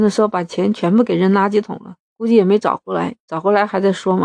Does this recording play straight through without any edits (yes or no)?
no